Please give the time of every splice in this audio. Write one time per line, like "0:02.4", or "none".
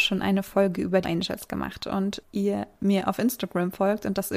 0:01.0
0:02.2